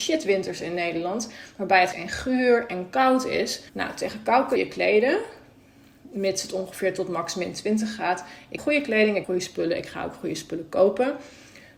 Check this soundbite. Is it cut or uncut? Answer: cut